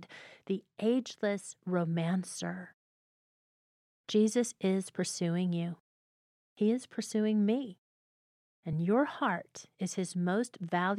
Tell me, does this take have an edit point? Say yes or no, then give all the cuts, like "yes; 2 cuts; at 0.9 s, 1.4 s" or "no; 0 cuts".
no; 0 cuts